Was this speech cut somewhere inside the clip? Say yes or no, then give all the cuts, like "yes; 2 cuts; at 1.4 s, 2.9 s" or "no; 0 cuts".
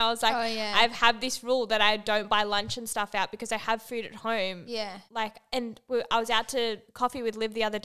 yes; 2 cuts; at 5.1 s, 6.9 s